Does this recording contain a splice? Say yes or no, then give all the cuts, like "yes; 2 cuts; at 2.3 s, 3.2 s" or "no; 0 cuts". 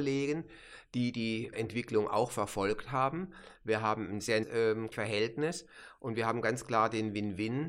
yes; 3 cuts; at 1.5 s, 4.4 s, 4.9 s